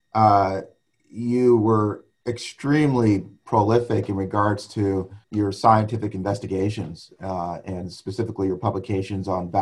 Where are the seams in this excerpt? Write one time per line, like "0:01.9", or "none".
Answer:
0:02.1
0:05.2